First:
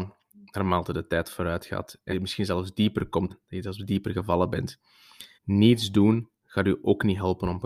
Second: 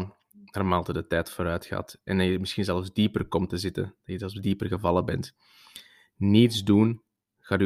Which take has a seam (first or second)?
first